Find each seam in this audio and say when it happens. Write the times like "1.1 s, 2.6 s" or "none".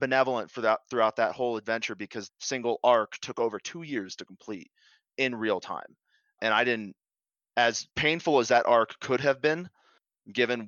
2.3 s, 6.4 s, 7.9 s